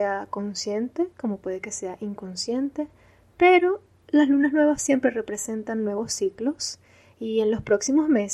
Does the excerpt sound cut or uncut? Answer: uncut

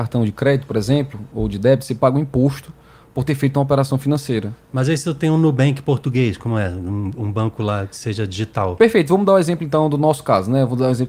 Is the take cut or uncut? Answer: uncut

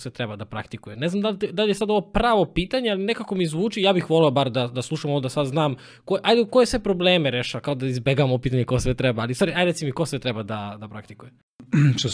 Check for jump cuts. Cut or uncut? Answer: uncut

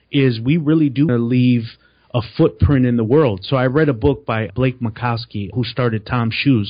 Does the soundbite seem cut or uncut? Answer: cut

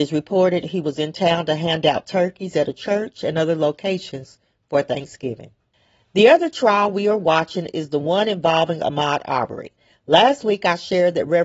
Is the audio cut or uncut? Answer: uncut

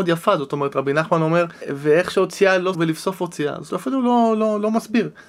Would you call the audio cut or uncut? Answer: cut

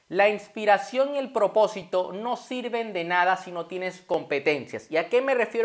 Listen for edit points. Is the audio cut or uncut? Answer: uncut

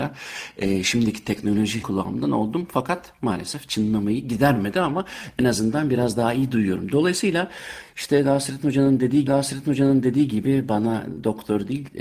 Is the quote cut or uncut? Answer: cut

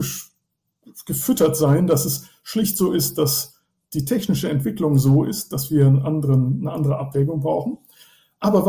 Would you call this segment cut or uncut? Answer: uncut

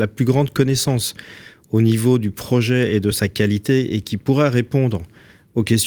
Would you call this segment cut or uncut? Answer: uncut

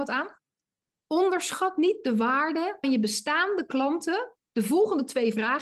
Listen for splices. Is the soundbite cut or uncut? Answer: cut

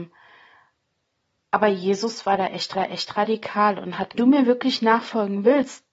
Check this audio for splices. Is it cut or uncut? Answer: cut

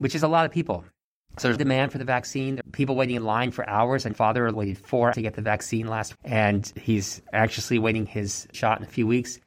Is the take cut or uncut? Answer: cut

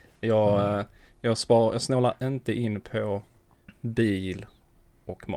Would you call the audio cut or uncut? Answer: uncut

